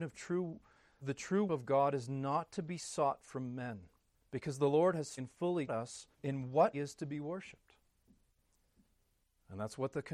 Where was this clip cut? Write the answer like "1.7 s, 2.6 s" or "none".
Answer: 1.0 s, 1.5 s, 4.1 s, 5.2 s, 5.7 s, 6.1 s, 6.7 s